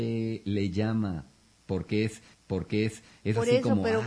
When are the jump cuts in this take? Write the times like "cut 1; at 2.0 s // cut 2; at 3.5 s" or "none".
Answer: cut 1; at 2.3 s